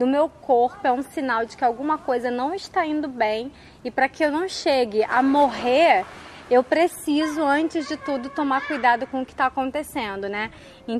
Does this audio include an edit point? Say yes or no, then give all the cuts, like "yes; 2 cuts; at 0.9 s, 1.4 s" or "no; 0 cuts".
no; 0 cuts